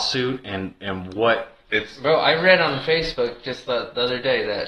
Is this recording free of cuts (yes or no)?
yes